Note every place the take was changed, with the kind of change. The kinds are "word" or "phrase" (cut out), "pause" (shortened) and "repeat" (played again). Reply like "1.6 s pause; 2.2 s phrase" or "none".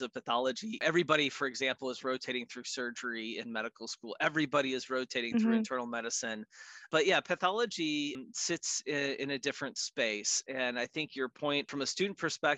none